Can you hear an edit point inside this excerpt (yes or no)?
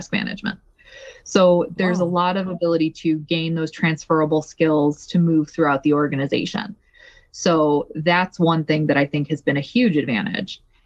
no